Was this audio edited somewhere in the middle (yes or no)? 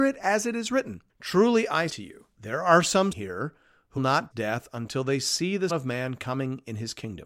yes